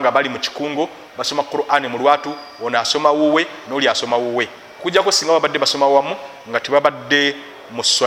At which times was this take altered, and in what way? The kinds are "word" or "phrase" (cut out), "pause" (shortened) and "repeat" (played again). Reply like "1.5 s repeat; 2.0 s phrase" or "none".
none